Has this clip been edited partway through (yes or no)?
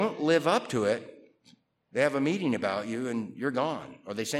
no